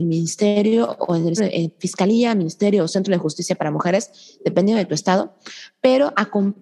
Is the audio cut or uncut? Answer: cut